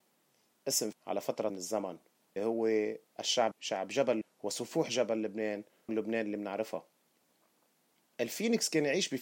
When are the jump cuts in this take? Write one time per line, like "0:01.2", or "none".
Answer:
0:00.9
0:01.5
0:02.4
0:03.5
0:04.2
0:05.9